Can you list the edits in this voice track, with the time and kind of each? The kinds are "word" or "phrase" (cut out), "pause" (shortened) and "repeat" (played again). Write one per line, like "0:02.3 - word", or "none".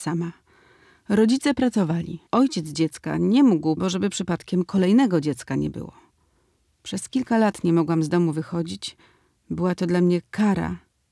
0:02.3 - pause
0:03.8 - phrase